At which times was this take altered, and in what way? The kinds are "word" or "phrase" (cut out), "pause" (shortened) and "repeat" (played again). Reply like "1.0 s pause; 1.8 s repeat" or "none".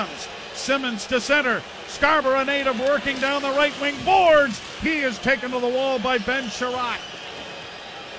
none